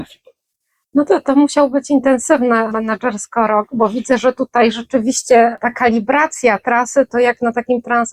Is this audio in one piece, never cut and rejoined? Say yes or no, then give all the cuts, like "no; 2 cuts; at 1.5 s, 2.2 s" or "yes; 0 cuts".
yes; 0 cuts